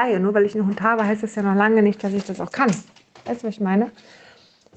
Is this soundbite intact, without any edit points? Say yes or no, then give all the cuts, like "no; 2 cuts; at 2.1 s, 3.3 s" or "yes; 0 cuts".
yes; 0 cuts